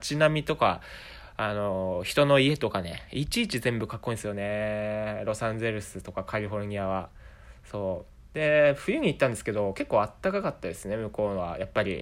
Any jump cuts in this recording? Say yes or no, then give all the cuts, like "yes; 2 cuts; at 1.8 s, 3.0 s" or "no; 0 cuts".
yes; 1 cut; at 8.2 s